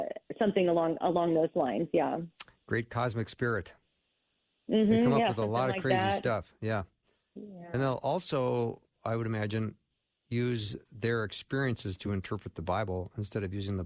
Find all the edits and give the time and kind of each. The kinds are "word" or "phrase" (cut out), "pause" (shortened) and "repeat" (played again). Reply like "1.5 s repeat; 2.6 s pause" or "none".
none

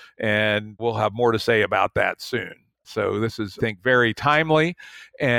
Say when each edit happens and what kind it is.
3.6 s word

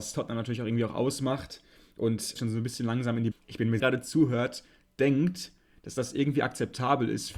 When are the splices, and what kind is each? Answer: 2.4 s phrase; 3.3 s phrase; 3.8 s phrase

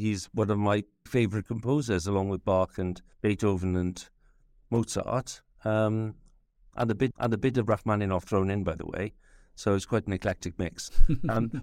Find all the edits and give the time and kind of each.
1.1 s word; 3.1 s pause; 7.1 s repeat

